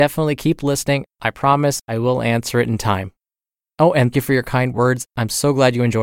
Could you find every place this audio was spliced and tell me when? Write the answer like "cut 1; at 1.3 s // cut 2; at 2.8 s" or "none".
cut 1; at 4.1 s

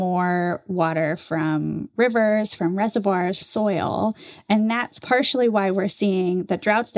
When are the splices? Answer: cut 1; at 3.4 s

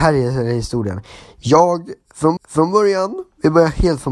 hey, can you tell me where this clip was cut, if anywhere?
cut 1; at 2.4 s

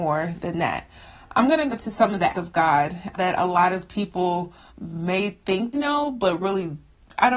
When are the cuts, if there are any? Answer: cut 1; at 1.7 s // cut 2; at 2.3 s // cut 3; at 3.2 s // cut 4; at 4.7 s // cut 5; at 5.7 s

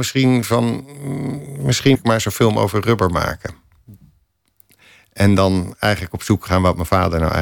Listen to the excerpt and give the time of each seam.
cut 1; at 1.9 s

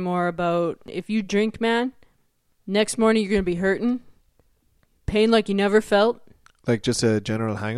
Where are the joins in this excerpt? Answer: none

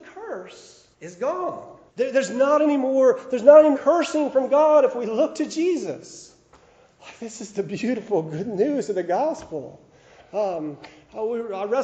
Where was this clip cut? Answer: cut 1; at 0.9 s // cut 2; at 1.9 s // cut 3; at 3.7 s

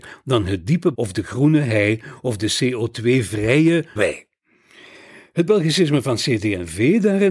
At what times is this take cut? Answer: cut 1; at 0.9 s // cut 2; at 4.0 s

